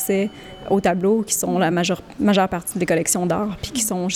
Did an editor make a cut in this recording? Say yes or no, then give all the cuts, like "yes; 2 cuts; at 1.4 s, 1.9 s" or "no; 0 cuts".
no; 0 cuts